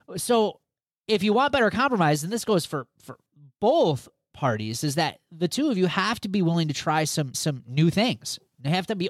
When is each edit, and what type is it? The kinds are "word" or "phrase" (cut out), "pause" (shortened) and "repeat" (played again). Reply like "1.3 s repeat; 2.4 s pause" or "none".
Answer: 7.3 s repeat